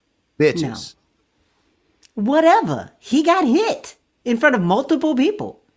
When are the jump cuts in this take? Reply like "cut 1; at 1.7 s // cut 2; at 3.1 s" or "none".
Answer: none